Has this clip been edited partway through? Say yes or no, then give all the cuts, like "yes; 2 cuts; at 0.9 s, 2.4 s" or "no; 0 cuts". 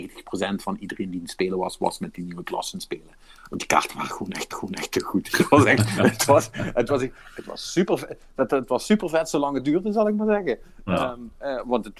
yes; 1 cut; at 4.5 s